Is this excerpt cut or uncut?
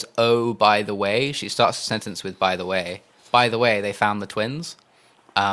uncut